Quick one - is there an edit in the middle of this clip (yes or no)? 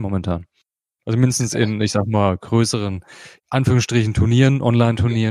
yes